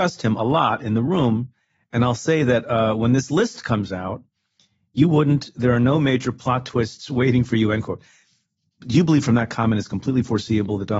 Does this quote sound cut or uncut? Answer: uncut